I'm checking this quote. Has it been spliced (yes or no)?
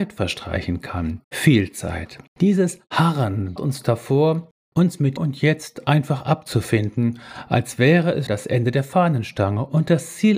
yes